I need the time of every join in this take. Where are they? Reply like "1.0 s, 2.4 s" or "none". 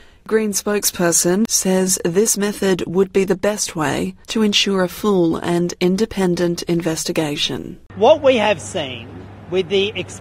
1.5 s, 4.2 s